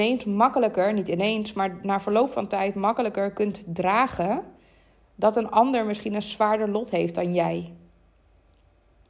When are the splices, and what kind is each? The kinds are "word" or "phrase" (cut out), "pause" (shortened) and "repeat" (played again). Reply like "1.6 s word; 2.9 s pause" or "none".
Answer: none